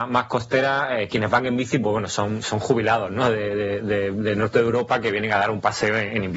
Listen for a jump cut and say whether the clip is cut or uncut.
uncut